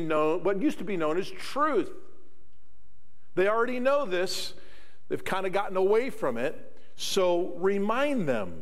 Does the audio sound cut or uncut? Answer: uncut